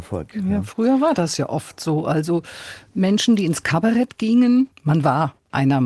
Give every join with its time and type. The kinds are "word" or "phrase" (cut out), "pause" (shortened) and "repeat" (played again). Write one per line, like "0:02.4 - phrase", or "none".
0:04.7 - pause